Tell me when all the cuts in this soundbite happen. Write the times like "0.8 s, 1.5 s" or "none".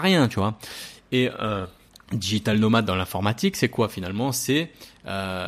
none